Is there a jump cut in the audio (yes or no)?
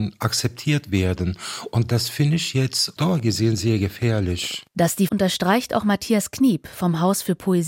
yes